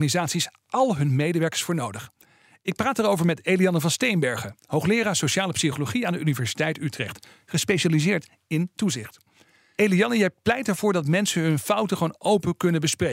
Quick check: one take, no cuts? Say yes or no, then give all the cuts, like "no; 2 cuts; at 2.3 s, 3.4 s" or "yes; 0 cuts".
yes; 0 cuts